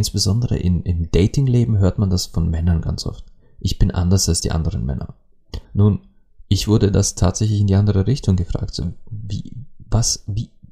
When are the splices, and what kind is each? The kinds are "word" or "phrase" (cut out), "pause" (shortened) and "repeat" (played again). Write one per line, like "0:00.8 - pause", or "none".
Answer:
0:05.6 - pause